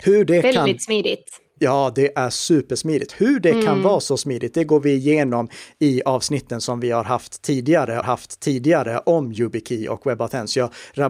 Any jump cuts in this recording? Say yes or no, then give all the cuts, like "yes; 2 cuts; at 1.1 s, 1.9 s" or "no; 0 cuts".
yes; 1 cut; at 8.0 s